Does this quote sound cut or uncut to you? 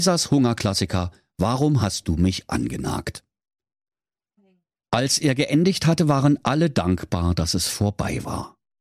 uncut